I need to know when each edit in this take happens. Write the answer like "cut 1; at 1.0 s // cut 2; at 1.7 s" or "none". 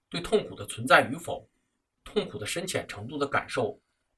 none